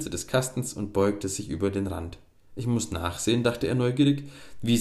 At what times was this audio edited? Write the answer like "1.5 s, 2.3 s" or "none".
2.3 s